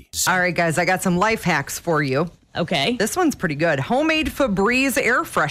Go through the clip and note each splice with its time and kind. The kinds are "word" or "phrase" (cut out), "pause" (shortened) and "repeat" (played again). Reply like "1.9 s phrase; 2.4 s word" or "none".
none